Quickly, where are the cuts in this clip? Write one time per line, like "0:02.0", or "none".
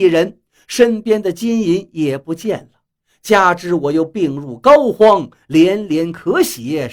none